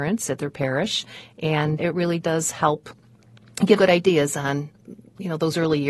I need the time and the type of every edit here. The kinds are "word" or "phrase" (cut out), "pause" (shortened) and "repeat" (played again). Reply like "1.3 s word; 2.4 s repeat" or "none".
1.8 s word; 3.8 s word